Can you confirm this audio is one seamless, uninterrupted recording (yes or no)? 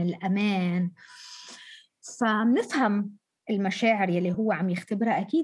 yes